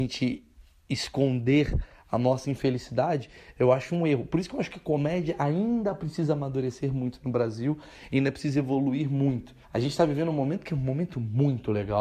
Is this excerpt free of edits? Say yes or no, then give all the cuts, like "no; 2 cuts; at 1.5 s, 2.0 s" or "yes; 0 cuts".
no; 1 cut; at 9.6 s